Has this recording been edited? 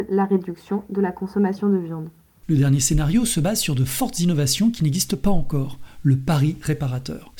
no; 0 cuts

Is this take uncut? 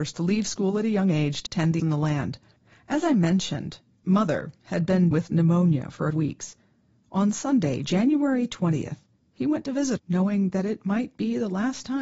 no; 6 cuts; at 1.5 s, 1.8 s, 4.0 s, 5.1 s, 6.1 s, 10.0 s

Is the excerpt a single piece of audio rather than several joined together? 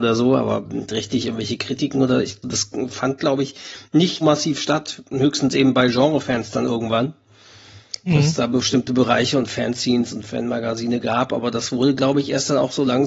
no; 2 cuts; at 2.4 s, 4.2 s

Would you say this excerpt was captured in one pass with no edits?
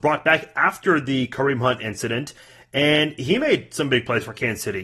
yes; 0 cuts

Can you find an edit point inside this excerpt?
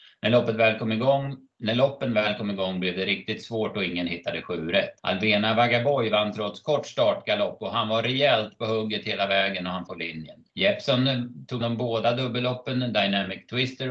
yes; 4 cuts; at 5.0 s, 9.9 s, 10.5 s, 11.6 s

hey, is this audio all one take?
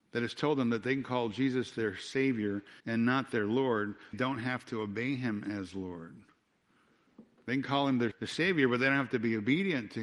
no; 3 cuts; at 2.8 s, 4.1 s, 8.1 s

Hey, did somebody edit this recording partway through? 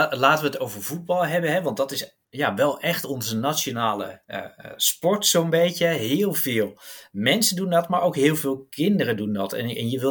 yes; 2 cuts; at 2.2 s, 4.2 s

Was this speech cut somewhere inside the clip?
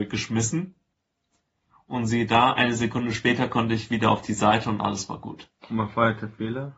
no; 0 cuts

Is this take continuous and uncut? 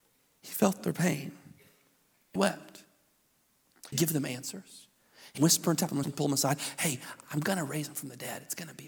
no; 4 cuts; at 2.4 s, 3.9 s, 5.4 s, 6.0 s

